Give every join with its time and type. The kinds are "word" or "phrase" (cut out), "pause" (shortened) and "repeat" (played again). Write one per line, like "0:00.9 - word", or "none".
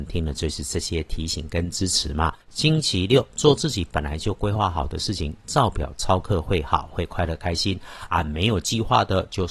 0:02.4 - pause